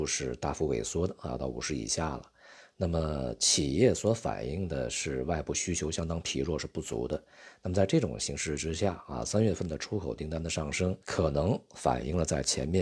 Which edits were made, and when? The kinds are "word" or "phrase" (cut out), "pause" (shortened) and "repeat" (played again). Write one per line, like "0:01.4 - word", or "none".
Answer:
0:11.0 - pause

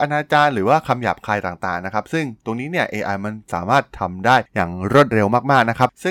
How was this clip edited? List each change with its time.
none

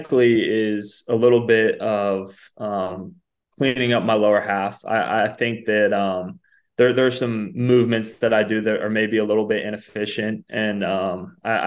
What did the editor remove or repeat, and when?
none

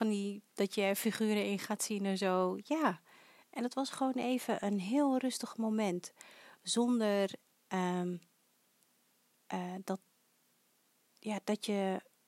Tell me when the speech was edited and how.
none

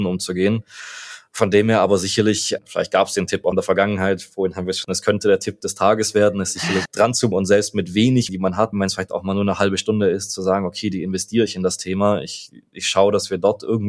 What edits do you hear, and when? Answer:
0:03.5 - word
0:04.8 - word
0:06.9 - word
0:07.3 - word
0:08.3 - word
0:08.7 - word

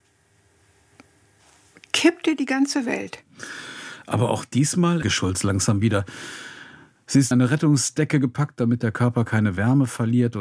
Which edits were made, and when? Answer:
0:05.0 - phrase
0:07.3 - phrase

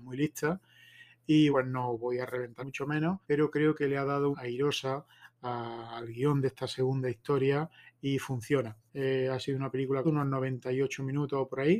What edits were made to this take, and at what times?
0:01.5 - word
0:02.6 - phrase
0:03.2 - pause
0:04.3 - phrase
0:08.9 - pause
0:10.0 - word

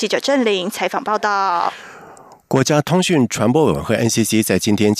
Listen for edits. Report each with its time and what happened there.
none

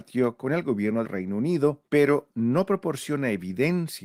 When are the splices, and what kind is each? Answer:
0:01.0 - word
0:01.9 - pause

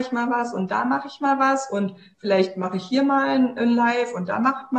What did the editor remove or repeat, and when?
none

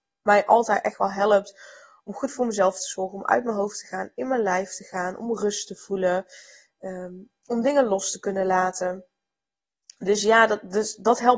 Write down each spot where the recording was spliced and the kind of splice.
none

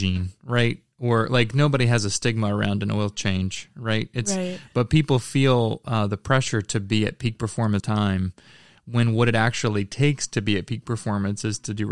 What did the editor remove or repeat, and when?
0:07.8 - phrase

